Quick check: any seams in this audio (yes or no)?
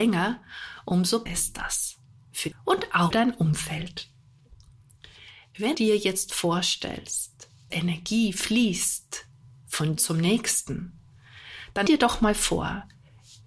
yes